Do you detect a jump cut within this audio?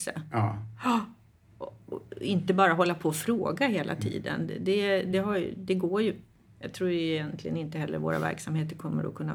no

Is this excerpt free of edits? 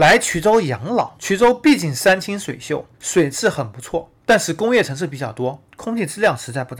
no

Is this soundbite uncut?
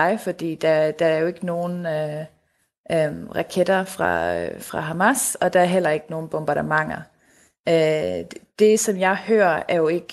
yes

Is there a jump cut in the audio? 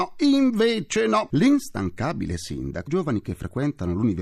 yes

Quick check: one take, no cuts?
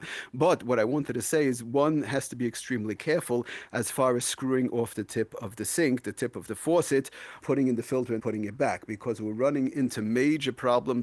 no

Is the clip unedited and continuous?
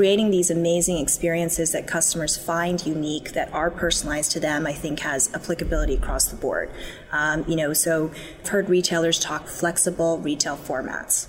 no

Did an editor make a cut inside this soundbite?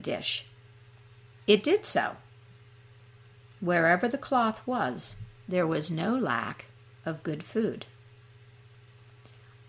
no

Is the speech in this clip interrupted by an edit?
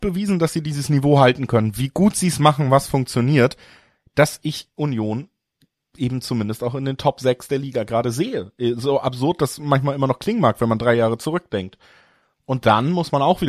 no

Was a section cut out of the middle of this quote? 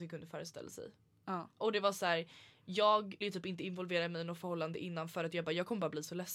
yes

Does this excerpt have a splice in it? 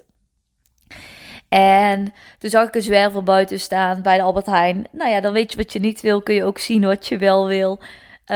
no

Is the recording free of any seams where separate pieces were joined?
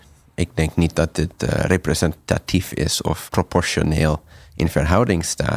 no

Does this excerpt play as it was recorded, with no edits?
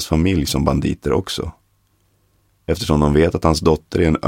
yes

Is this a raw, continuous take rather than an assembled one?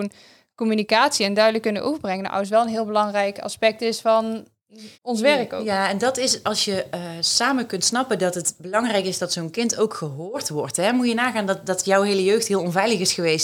no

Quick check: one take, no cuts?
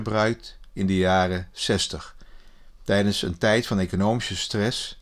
yes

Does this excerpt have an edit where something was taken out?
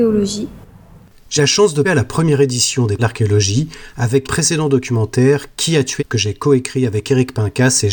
yes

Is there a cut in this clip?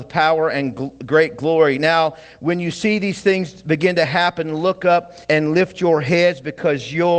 yes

